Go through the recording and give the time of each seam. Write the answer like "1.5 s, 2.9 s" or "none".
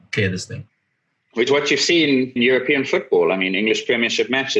1.5 s, 2.4 s